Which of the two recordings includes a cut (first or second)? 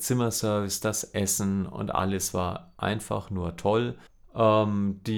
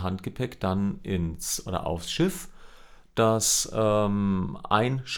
first